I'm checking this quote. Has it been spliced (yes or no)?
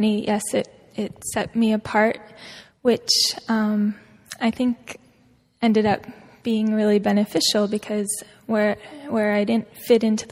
no